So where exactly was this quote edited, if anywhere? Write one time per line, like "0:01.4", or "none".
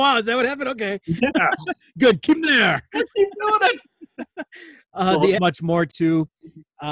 0:02.3
0:05.4
0:05.9

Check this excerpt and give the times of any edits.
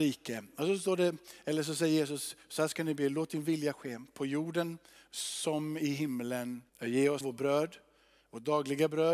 0:06.7
0:07.2

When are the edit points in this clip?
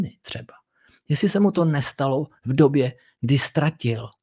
none

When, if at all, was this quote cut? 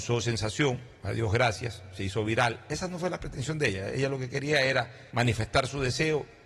0:00.9
0:05.1

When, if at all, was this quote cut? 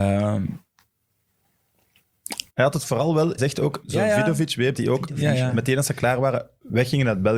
0:02.5
0:03.4
0:04.7

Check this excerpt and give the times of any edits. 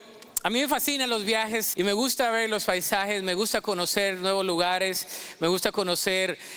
0:01.7

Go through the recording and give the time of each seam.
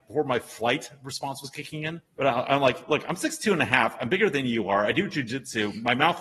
0:02.1

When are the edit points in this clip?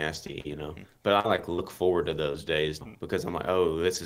0:02.8

